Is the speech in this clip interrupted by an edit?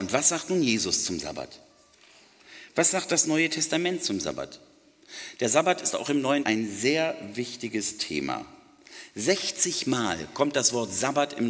yes; 1 cut; at 6.4 s

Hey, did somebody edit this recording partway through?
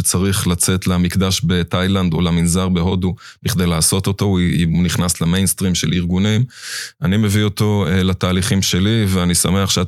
no; 0 cuts

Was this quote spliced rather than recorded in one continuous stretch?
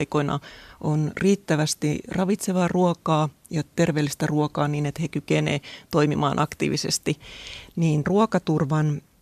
yes; 2 cuts; at 3.5 s, 8.1 s

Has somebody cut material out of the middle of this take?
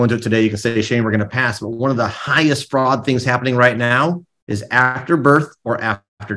no; 0 cuts

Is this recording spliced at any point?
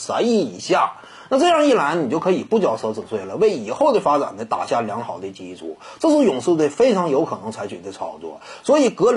no; 0 cuts

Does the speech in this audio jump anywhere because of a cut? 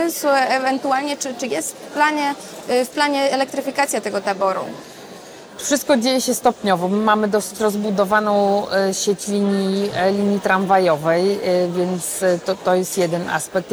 no; 0 cuts

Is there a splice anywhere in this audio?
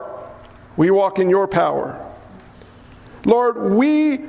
no; 0 cuts

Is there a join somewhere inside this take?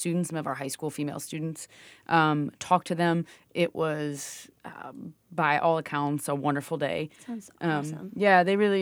no; 0 cuts

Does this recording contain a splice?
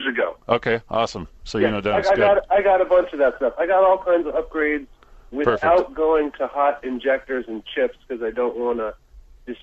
no; 0 cuts

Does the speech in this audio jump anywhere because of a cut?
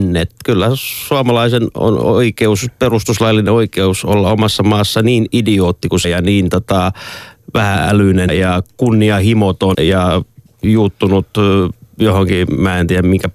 yes; 3 cuts; at 6.0 s, 8.3 s, 9.7 s

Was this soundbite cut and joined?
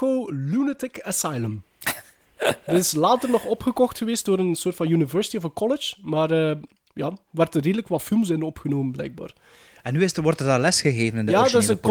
no; 0 cuts

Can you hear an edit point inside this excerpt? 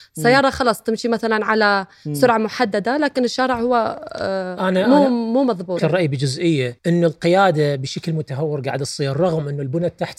yes; 2 cuts; at 5.8 s, 6.8 s

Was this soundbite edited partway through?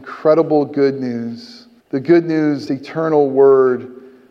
yes; 2 cuts; at 1.8 s, 2.7 s

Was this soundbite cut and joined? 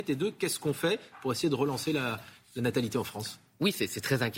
no; 0 cuts

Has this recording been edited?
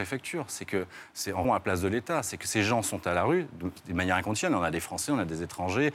yes; 1 cut; at 1.4 s

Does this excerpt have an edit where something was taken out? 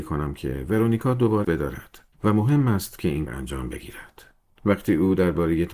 yes; 3 cuts; at 1.4 s, 2.1 s, 3.3 s

